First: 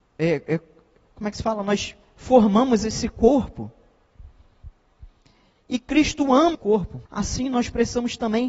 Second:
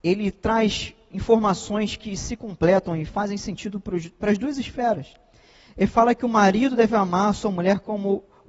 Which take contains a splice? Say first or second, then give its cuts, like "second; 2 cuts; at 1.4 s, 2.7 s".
first; 2 cuts; at 6.5 s, 7.1 s